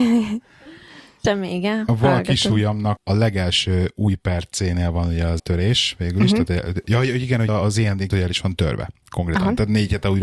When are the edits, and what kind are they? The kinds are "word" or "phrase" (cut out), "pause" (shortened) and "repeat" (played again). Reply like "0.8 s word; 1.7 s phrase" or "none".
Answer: 3.0 s word; 5.4 s word; 7.5 s word; 8.1 s word